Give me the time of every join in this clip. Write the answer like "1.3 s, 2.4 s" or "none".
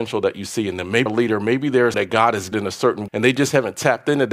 1.1 s, 1.9 s, 2.5 s, 3.1 s